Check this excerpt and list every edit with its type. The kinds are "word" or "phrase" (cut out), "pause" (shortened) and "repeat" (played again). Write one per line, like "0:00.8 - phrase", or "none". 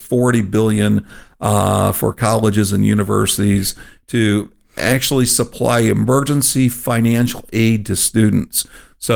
none